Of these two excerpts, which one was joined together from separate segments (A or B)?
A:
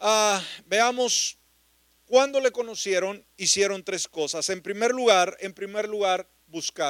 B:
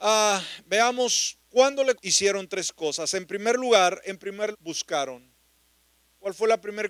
B